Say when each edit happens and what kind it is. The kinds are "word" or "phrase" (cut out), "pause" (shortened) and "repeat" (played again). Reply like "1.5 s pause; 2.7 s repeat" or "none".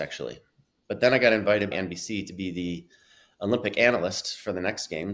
1.7 s word